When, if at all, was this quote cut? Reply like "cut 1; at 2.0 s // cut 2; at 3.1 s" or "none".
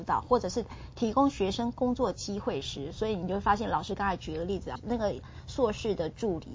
cut 1; at 4.7 s